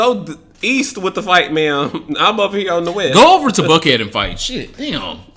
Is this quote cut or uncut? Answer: uncut